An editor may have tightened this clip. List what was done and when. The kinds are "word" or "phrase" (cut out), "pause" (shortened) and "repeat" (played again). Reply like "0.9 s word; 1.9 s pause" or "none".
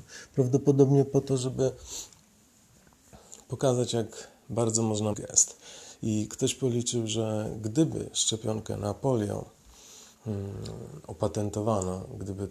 5.1 s word; 10.1 s pause